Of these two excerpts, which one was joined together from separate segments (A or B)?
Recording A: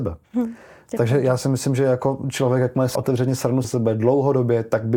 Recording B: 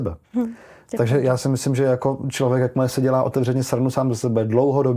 A